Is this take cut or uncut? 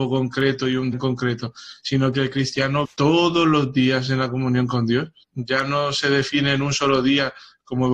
cut